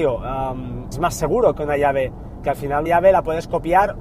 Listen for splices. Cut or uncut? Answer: cut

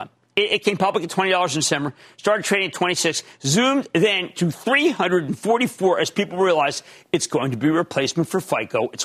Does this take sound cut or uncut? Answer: uncut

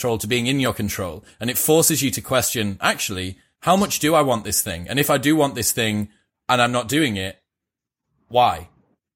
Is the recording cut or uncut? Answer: uncut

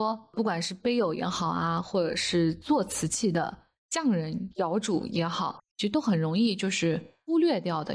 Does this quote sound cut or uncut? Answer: uncut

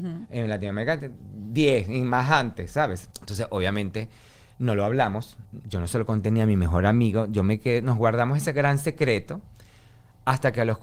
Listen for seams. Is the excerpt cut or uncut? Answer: cut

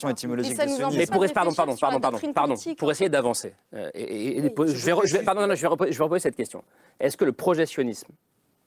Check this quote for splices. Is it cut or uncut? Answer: uncut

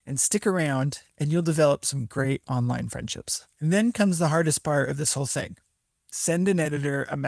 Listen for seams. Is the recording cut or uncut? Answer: cut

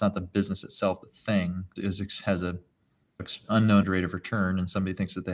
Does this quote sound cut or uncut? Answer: cut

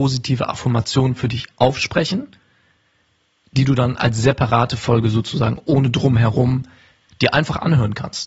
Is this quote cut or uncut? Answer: uncut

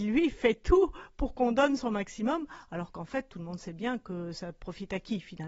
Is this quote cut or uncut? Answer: uncut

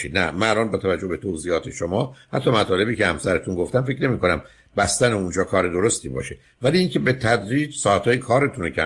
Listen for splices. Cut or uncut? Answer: uncut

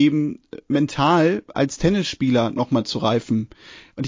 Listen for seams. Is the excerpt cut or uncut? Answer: uncut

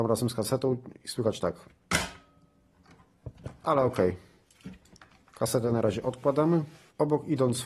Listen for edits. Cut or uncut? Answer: uncut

